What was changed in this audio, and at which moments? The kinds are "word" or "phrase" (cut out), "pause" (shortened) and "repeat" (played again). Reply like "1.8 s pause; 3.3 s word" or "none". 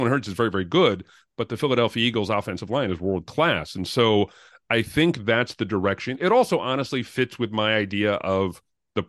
none